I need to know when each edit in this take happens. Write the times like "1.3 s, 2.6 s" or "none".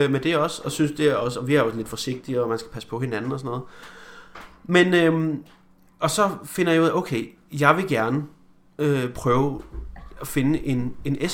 none